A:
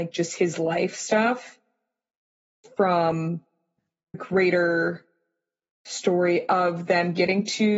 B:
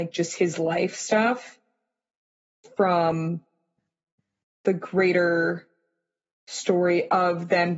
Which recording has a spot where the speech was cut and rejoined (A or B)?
A